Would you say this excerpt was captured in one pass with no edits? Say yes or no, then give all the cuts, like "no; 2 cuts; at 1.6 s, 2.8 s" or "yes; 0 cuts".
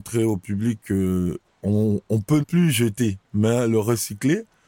no; 3 cuts; at 1.4 s, 2.4 s, 3.2 s